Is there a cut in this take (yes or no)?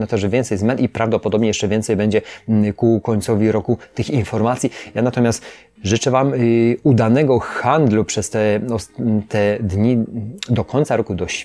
no